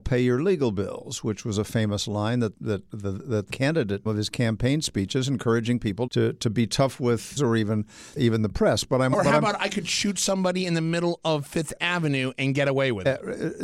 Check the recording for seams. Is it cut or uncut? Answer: cut